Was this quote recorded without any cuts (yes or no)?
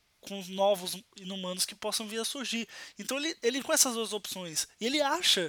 no